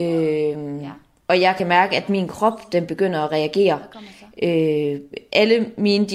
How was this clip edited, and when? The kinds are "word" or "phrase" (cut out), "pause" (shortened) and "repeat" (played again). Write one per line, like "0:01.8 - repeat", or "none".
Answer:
none